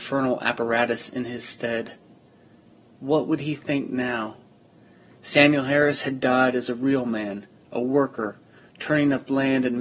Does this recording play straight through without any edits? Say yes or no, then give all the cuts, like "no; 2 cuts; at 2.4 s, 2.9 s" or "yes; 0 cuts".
yes; 0 cuts